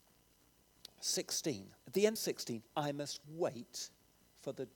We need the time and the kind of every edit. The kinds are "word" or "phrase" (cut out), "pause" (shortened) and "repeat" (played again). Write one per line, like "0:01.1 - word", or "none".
0:01.8 - pause
0:02.2 - phrase
0:02.7 - word
0:03.2 - word